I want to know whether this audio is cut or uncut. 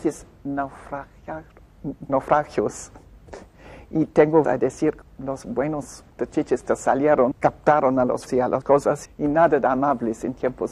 cut